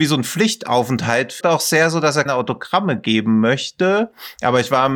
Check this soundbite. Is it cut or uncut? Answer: cut